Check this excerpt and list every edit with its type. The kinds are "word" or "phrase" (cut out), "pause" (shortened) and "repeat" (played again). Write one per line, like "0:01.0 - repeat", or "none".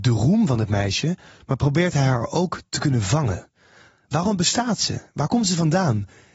none